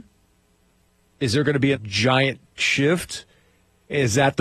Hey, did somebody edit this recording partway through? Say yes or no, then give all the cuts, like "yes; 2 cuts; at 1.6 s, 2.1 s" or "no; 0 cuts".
yes; 2 cuts; at 1.7 s, 2.6 s